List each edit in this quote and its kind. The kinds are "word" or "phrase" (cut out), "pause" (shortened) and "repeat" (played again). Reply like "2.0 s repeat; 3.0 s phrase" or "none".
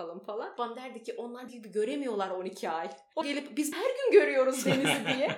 1.5 s word; 3.2 s word; 3.7 s word